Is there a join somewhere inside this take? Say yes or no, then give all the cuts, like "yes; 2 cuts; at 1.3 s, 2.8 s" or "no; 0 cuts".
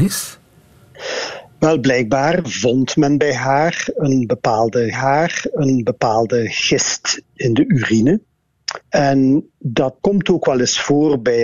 yes; 3 cuts; at 4.9 s, 8.8 s, 10.0 s